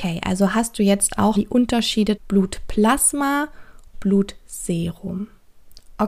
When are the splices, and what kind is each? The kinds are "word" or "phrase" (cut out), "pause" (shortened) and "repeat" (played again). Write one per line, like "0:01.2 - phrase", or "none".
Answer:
0:01.3 - word
0:02.2 - word
0:03.9 - word